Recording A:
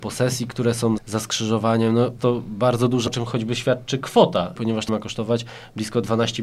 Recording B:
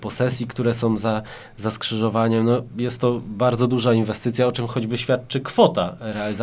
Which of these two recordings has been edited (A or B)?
A